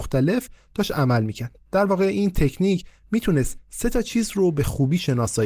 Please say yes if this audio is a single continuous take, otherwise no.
yes